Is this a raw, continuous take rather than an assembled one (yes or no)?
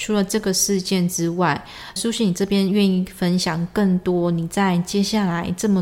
no